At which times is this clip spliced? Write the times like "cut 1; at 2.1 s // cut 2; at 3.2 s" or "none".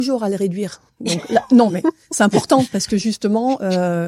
none